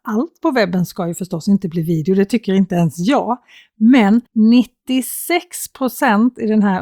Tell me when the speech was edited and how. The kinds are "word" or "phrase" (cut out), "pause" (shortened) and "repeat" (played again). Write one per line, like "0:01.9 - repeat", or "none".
0:04.3 - pause